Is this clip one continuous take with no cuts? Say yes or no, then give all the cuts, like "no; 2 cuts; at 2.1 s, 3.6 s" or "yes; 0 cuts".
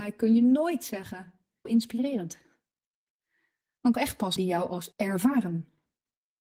no; 4 cuts; at 1.7 s, 3.9 s, 4.4 s, 4.9 s